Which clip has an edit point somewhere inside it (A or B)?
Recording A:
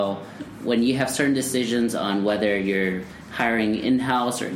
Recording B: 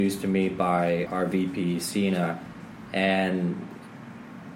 B